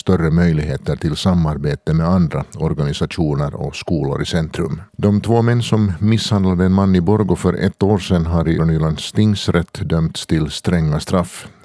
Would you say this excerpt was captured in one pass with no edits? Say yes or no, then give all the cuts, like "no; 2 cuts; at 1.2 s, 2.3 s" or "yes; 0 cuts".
no; 2 cuts; at 4.9 s, 8.6 s